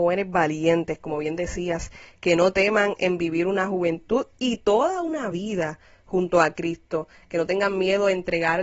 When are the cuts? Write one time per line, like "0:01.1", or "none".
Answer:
none